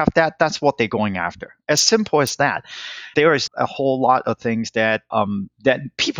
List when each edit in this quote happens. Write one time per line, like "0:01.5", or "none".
0:03.1
0:03.5
0:05.1